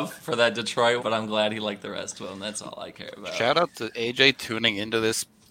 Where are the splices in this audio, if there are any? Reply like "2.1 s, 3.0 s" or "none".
1.0 s